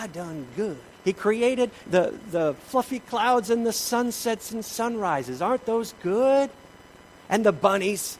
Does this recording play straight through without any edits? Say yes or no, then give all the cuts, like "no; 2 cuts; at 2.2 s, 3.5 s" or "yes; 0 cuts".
no; 2 cuts; at 0.9 s, 1.8 s